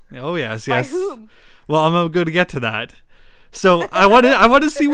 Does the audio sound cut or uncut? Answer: uncut